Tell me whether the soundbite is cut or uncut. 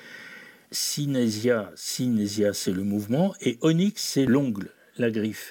uncut